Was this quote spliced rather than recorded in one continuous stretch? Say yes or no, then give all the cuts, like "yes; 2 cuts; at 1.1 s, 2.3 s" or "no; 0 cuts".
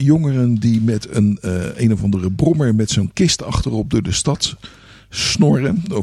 no; 0 cuts